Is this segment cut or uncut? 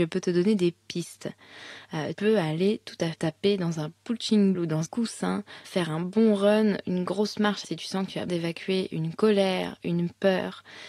cut